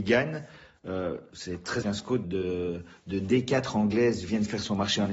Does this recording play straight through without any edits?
no; 3 cuts; at 1.3 s, 1.8 s, 2.2 s

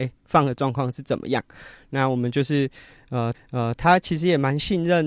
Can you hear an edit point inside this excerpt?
yes; 1 cut; at 3.3 s

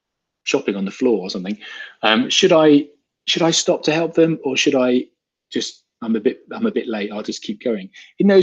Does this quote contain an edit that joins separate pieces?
no; 0 cuts

